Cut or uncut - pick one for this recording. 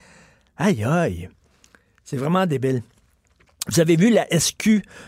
uncut